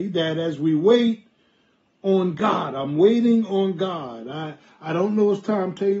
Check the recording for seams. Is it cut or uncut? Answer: uncut